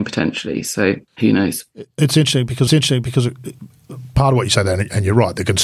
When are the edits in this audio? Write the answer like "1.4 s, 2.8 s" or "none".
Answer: 1.1 s, 1.9 s, 2.7 s